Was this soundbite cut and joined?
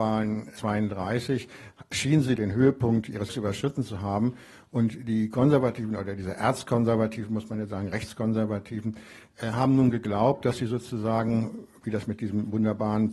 yes; 2 cuts; at 2.4 s, 3.3 s

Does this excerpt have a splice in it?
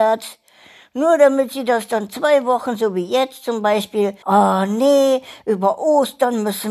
yes; 1 cut; at 4.2 s

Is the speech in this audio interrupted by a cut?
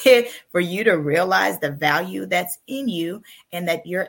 no; 0 cuts

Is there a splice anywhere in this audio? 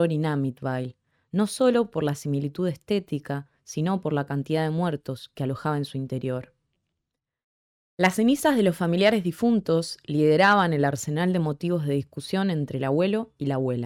no; 0 cuts

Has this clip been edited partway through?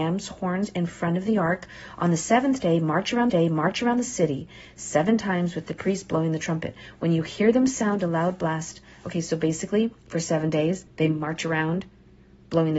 yes; 3 cuts; at 3.3 s, 10.0 s, 10.9 s

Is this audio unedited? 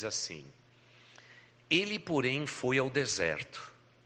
yes; 0 cuts

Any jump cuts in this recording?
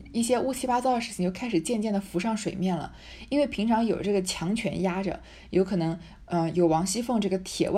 no; 0 cuts

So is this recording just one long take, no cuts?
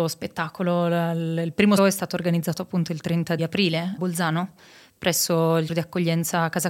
no; 4 cuts; at 1.8 s, 3.4 s, 4.0 s, 5.7 s

